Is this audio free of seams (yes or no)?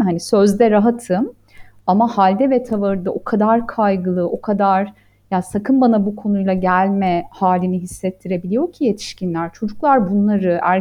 yes